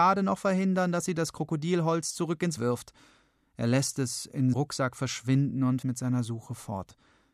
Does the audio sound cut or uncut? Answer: cut